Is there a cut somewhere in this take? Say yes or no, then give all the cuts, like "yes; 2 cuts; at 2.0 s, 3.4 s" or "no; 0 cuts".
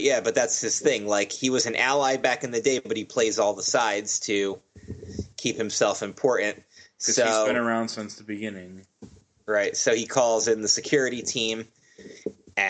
no; 0 cuts